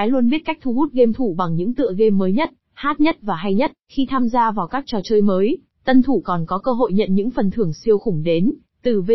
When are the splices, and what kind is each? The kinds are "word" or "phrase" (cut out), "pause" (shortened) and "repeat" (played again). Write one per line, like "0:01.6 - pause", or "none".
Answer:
0:03.8 - pause